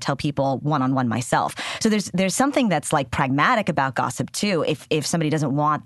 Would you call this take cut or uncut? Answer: uncut